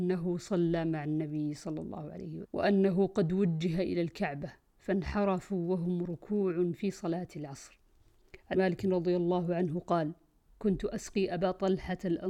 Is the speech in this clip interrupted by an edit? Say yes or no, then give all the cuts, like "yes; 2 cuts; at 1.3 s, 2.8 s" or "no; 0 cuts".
yes; 2 cuts; at 2.4 s, 8.5 s